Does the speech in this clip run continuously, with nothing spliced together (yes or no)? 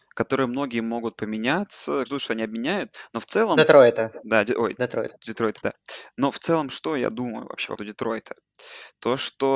no